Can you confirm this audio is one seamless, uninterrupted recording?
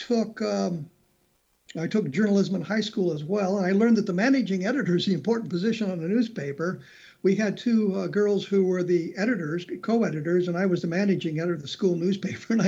yes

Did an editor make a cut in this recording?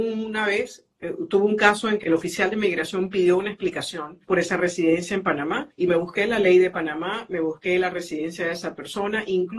yes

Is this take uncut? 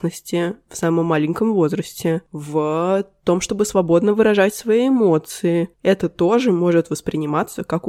no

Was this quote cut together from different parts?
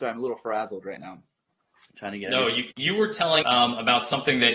yes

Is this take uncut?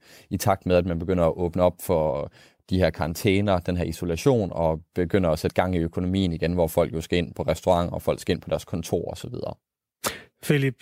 yes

